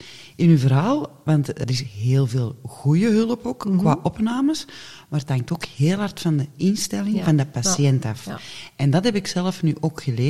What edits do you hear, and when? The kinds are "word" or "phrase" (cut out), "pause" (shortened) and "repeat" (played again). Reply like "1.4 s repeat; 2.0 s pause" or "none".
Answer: 1.6 s word